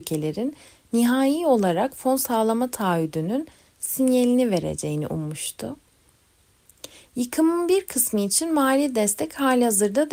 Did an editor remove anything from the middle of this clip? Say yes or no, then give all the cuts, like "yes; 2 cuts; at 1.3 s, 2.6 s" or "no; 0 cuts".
no; 0 cuts